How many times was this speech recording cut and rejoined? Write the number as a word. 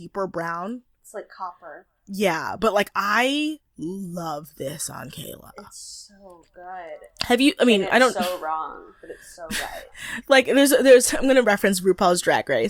one